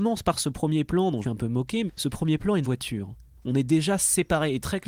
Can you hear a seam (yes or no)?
yes